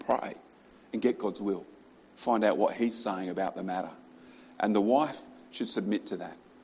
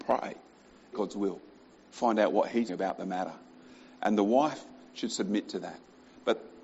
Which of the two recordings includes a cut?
second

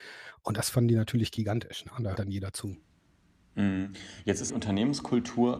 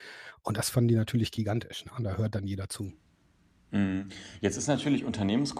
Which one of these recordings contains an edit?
first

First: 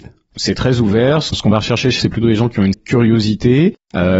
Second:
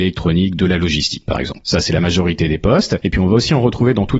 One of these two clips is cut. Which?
first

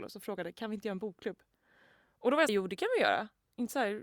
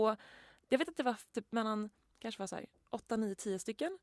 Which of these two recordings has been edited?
first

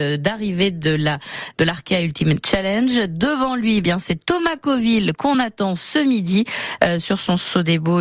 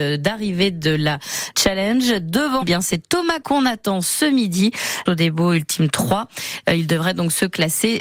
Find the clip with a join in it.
second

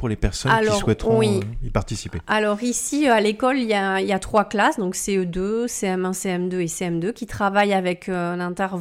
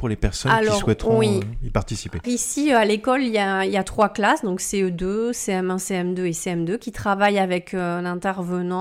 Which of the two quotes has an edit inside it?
second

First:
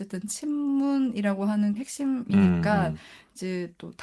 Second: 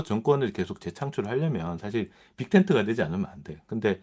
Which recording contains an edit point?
first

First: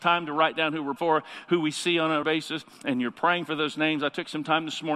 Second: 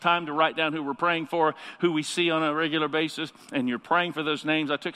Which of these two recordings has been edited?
first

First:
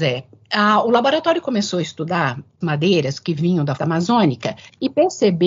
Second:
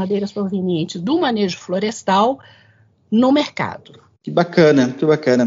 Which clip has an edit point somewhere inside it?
first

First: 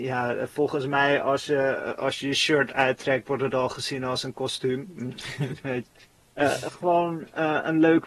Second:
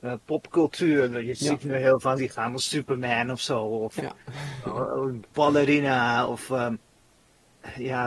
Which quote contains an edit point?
second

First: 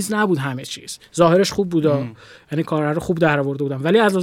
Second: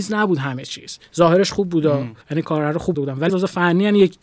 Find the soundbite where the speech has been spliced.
second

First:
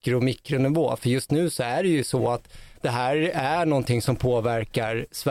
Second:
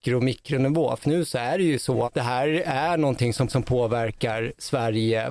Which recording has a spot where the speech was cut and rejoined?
second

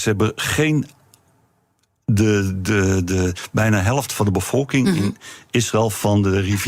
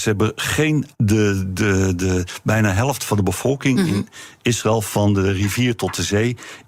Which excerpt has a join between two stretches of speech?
second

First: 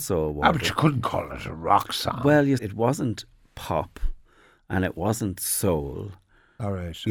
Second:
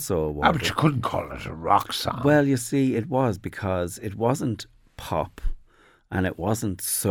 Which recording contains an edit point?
first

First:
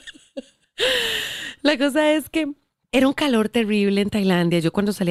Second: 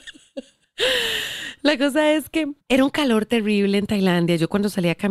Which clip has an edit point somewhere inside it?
second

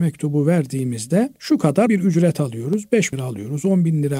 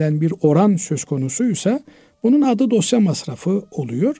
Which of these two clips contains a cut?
first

